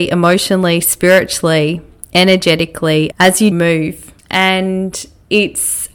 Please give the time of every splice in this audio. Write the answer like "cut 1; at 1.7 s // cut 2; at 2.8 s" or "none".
cut 1; at 3.1 s // cut 2; at 3.5 s // cut 3; at 4.2 s